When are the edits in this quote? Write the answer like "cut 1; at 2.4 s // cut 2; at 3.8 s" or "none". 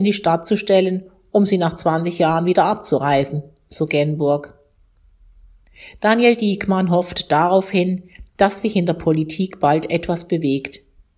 none